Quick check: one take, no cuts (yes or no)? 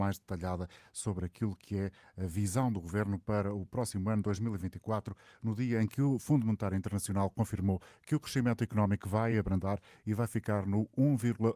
yes